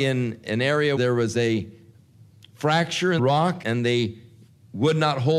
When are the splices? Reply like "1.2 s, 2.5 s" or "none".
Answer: 1.0 s, 3.2 s, 3.6 s